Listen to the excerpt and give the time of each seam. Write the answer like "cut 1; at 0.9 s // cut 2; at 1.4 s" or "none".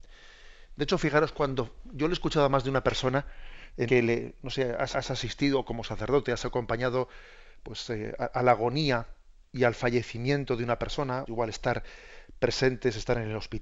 cut 1; at 3.9 s // cut 2; at 4.9 s // cut 3; at 11.3 s